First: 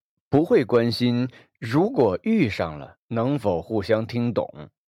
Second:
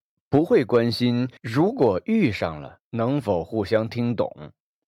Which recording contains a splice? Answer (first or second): second